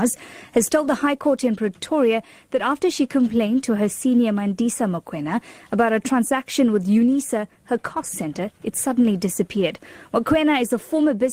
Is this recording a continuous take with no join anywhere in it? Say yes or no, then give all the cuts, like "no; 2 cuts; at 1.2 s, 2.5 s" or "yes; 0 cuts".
yes; 0 cuts